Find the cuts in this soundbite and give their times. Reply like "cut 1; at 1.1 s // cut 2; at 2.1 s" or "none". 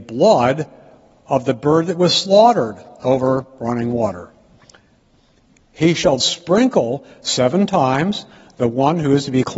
cut 1; at 6.2 s